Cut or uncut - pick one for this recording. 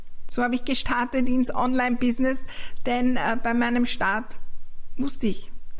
uncut